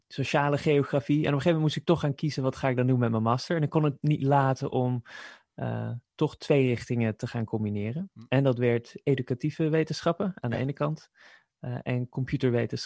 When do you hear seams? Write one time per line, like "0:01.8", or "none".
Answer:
none